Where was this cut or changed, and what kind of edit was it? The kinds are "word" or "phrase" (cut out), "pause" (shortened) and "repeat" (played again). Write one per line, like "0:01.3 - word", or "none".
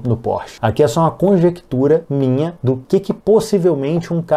none